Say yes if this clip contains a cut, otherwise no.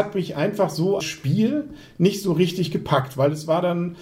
yes